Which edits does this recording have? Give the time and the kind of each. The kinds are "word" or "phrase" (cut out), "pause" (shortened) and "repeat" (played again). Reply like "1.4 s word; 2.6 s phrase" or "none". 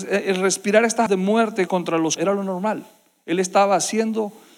1.1 s word; 1.7 s word; 2.2 s word